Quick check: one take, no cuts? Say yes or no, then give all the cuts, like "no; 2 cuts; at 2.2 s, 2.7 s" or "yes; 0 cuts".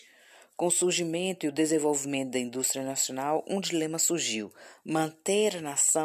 yes; 0 cuts